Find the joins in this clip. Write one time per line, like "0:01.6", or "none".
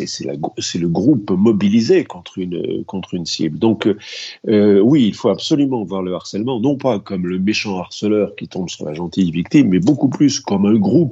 none